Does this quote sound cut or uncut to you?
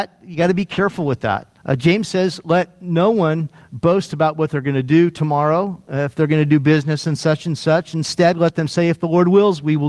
cut